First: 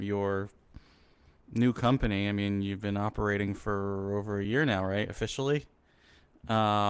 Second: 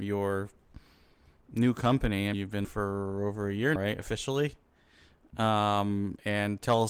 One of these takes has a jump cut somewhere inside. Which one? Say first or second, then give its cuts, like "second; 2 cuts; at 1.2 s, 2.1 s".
second; 3 cuts; at 2.3 s, 2.6 s, 3.8 s